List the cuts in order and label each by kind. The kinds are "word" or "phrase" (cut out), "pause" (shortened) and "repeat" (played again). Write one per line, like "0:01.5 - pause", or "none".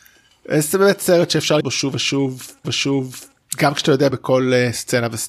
0:01.6 - word
0:02.6 - repeat
0:04.1 - phrase